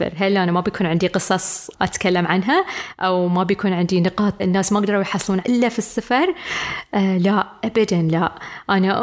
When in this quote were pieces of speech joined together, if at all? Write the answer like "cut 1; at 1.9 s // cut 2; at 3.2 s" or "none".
cut 1; at 4.4 s // cut 2; at 5.4 s